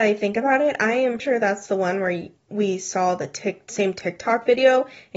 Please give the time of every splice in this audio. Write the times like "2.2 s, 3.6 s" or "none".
1.2 s, 2.4 s